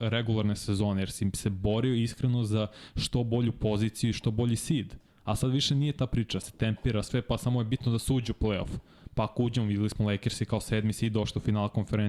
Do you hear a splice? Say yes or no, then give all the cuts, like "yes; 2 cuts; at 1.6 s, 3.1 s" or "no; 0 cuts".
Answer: yes; 1 cut; at 6.4 s